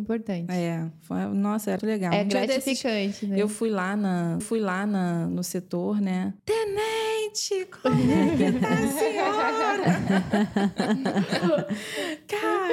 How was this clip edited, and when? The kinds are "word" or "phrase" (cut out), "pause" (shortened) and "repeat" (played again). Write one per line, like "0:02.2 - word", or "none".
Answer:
0:01.8 - word
0:04.4 - repeat
0:06.4 - pause